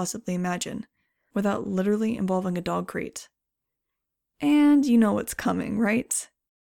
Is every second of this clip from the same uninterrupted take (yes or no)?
yes